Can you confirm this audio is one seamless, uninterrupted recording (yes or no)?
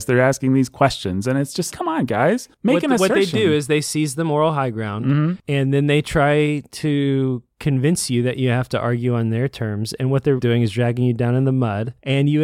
no